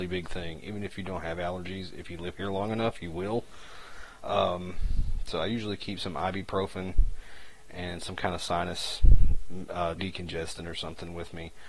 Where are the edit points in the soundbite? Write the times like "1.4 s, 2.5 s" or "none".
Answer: 10.0 s